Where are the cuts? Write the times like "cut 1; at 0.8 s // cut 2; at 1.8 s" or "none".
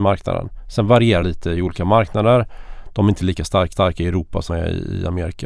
cut 1; at 1.2 s // cut 2; at 3.7 s // cut 3; at 4.5 s